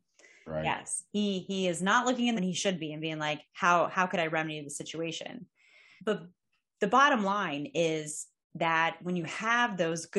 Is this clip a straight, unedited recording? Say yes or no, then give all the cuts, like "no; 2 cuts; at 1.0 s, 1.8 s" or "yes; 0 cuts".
no; 2 cuts; at 2.4 s, 6.0 s